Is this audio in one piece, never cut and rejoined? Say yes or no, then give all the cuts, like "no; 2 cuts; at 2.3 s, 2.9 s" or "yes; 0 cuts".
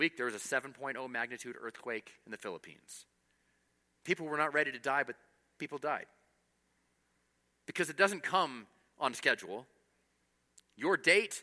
yes; 0 cuts